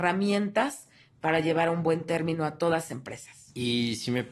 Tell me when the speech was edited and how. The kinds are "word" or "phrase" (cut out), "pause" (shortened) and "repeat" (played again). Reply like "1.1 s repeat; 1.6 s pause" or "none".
2.9 s word